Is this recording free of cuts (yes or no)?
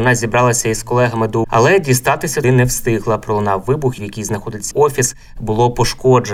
no